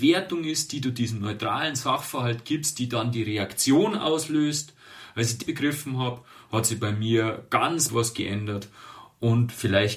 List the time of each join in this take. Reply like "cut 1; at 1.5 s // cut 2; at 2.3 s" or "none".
cut 1; at 5.4 s // cut 2; at 7.9 s